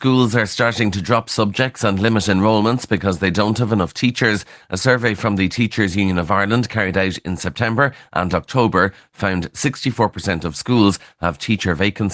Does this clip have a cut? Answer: no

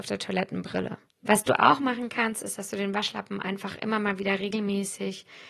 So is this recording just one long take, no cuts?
no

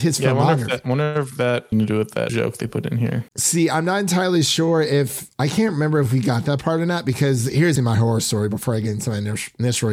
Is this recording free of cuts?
no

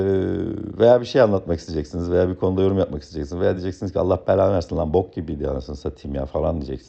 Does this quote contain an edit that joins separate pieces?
no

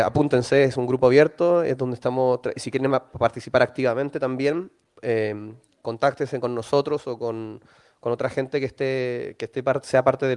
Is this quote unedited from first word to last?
yes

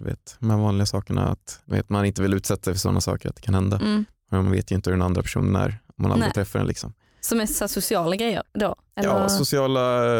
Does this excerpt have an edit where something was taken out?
yes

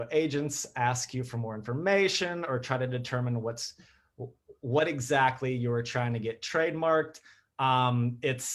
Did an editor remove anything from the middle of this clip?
no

